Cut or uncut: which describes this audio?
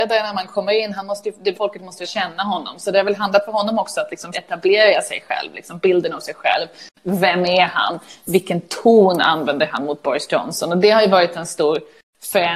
cut